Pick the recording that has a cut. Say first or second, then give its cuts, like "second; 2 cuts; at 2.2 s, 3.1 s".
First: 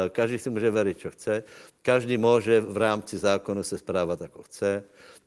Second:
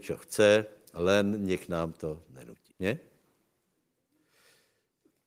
second; 1 cut; at 2.7 s